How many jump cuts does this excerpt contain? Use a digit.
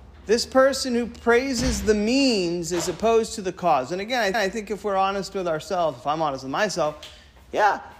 1